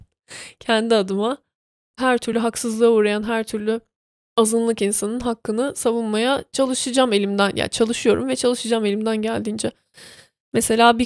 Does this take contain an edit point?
no; 0 cuts

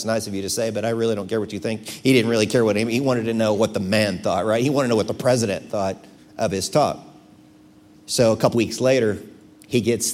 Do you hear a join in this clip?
yes; 2 cuts; at 6.2 s, 8.5 s

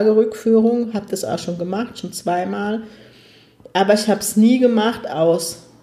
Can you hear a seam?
no; 0 cuts

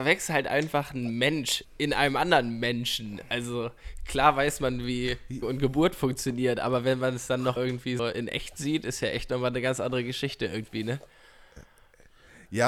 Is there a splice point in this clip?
yes; 4 cuts; at 1.6 s, 5.4 s, 7.6 s, 8.0 s

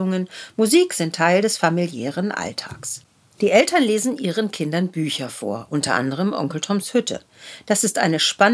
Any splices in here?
no; 0 cuts

